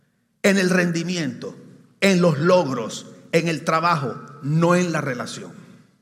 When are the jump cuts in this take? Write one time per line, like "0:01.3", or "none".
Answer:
none